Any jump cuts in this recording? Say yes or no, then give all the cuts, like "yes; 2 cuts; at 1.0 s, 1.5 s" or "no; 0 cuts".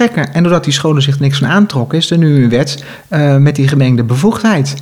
no; 0 cuts